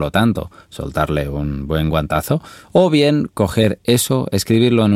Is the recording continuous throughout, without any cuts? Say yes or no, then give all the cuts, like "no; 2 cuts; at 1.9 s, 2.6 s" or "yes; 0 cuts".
yes; 0 cuts